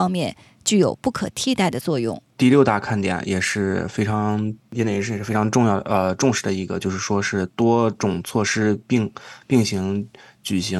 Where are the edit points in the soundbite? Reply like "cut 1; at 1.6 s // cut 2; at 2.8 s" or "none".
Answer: cut 1; at 2.3 s